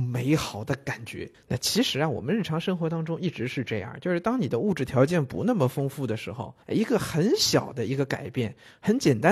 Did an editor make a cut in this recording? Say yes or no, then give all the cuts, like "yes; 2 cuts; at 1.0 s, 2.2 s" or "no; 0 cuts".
yes; 2 cuts; at 1.3 s, 6.6 s